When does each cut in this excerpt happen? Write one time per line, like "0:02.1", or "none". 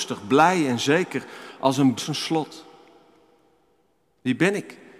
0:02.0